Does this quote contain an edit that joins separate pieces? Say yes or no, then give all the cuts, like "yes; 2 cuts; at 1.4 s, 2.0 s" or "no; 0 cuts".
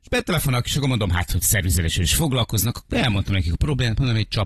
no; 0 cuts